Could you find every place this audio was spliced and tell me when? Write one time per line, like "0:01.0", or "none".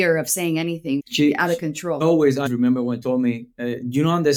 0:01.0
0:02.0
0:02.5
0:03.0